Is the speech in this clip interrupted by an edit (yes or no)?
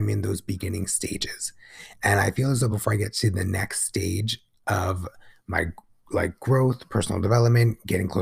no